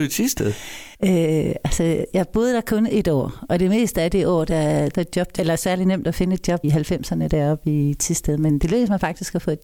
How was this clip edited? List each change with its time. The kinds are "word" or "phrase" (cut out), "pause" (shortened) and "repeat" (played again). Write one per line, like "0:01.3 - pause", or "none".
0:00.9 - pause
0:04.9 - phrase
0:05.4 - phrase
0:06.6 - word